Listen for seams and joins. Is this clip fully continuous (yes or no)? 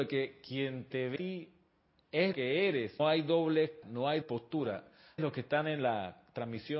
no